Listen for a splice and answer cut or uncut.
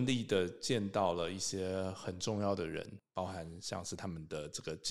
uncut